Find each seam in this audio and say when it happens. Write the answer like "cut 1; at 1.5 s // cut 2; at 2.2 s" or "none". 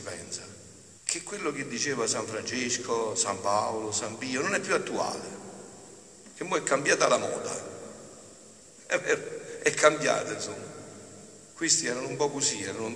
cut 1; at 1.0 s // cut 2; at 11.5 s